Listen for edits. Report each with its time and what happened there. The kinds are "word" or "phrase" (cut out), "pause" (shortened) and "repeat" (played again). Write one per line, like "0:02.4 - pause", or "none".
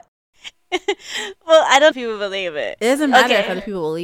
0:01.9 - phrase